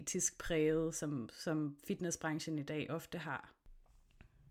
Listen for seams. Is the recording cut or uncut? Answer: uncut